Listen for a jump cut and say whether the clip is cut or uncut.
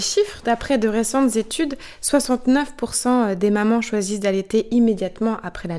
uncut